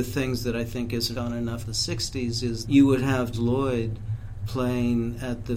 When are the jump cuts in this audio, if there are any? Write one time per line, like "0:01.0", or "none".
0:01.1
0:01.6
0:02.6
0:03.3